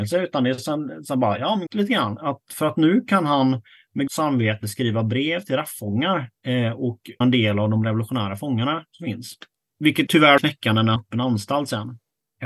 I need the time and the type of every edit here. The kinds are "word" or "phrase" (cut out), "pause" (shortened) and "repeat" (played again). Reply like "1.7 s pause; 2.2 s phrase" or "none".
1.7 s word; 4.1 s word; 6.4 s pause; 7.2 s word; 10.1 s word; 10.4 s phrase; 11.0 s phrase